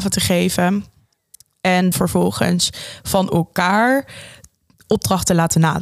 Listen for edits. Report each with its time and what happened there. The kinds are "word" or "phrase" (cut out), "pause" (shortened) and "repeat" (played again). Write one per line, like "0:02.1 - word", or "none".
0:01.9 - word